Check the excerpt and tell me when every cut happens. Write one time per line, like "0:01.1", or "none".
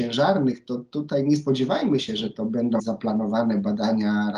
0:02.8